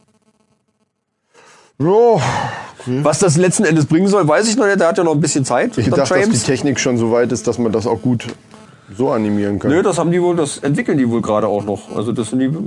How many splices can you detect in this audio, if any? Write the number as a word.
one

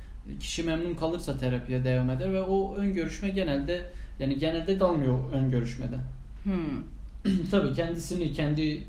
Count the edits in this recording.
one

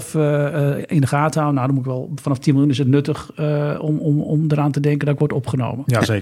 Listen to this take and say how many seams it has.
zero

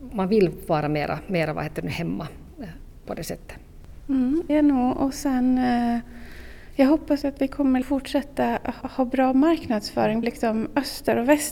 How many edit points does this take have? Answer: five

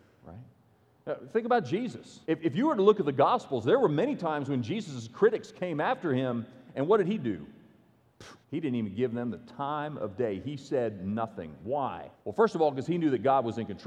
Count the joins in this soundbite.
three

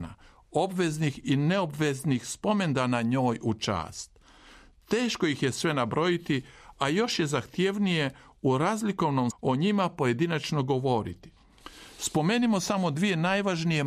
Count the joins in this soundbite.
one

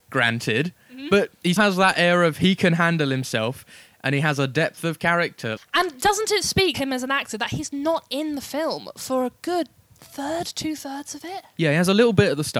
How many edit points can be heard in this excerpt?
three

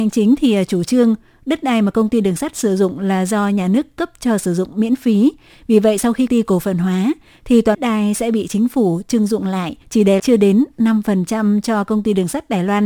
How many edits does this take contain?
four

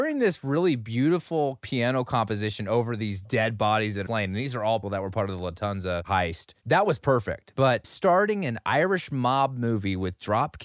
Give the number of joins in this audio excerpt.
three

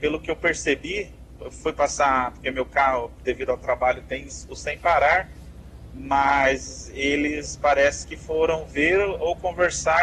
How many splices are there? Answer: zero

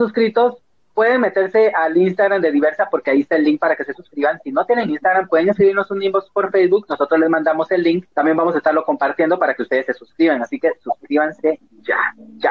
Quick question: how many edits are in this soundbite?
one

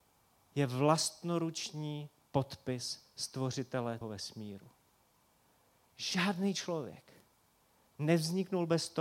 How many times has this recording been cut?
one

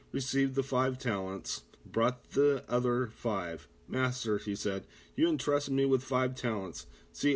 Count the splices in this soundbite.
one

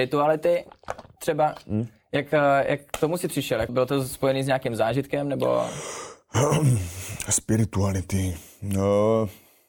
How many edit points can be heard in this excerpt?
one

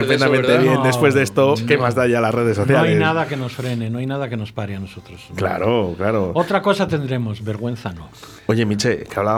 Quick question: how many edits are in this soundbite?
zero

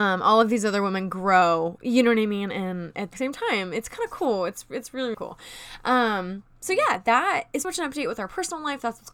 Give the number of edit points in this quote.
three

